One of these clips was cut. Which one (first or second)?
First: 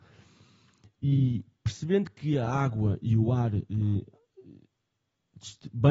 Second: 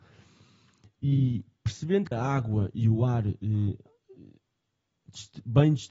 second